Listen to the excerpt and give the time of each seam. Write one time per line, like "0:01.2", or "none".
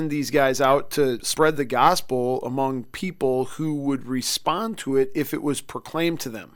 none